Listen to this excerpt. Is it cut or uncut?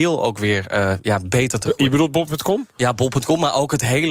cut